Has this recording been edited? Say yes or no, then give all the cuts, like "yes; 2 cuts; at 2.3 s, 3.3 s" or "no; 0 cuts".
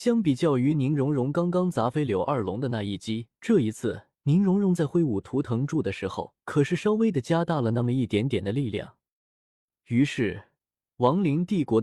yes; 3 cuts; at 3.4 s, 4.1 s, 6.4 s